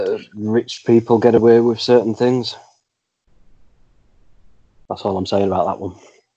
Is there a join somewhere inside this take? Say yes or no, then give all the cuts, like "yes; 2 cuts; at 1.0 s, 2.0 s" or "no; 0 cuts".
no; 0 cuts